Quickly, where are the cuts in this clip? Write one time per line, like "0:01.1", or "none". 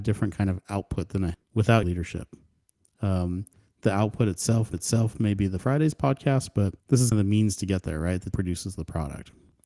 0:01.3
0:01.8
0:03.5
0:04.7
0:05.6
0:06.8
0:07.1
0:08.3